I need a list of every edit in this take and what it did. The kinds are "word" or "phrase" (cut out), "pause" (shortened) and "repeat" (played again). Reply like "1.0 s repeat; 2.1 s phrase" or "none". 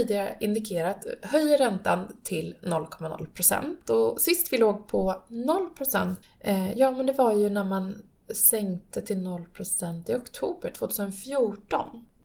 none